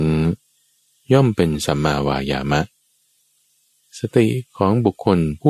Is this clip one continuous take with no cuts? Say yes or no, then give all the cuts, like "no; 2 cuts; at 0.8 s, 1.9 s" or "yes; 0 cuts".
yes; 0 cuts